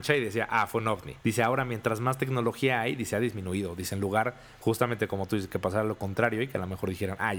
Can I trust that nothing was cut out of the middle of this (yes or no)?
no